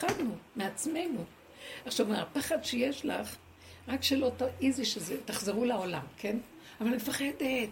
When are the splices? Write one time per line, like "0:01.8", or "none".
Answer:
none